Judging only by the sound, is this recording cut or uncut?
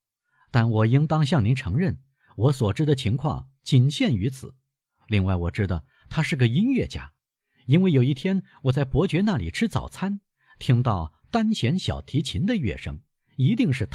uncut